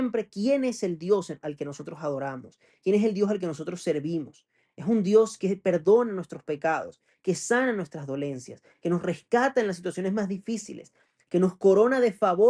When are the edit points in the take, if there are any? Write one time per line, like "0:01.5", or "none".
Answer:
none